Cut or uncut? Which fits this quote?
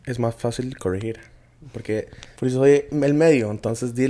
cut